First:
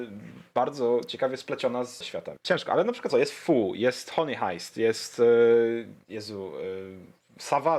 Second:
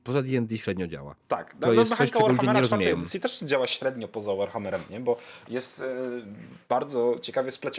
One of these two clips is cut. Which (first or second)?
first